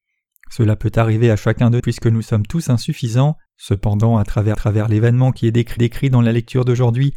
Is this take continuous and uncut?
no; 4 cuts; at 1.8 s, 3.5 s, 4.5 s, 5.8 s

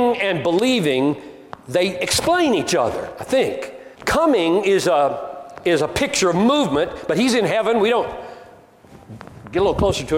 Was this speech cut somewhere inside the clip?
yes; 1 cut; at 3.9 s

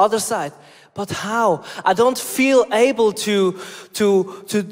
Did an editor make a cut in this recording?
no; 0 cuts

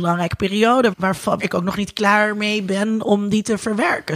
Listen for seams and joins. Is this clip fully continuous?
no; 2 cuts; at 0.9 s, 1.4 s

